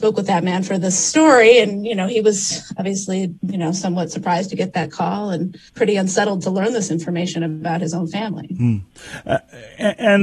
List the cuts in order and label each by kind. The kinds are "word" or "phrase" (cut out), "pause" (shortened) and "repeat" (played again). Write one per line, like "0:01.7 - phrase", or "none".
0:05.7 - pause